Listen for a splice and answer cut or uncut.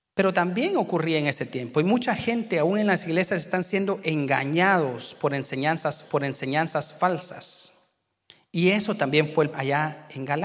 cut